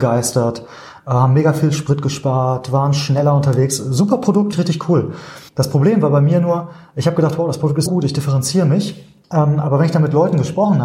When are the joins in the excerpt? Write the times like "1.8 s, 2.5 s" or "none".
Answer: 4.5 s, 5.5 s, 7.9 s